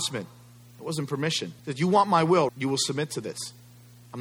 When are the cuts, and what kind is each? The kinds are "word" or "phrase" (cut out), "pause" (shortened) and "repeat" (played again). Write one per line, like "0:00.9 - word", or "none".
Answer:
0:01.6 - pause
0:02.5 - word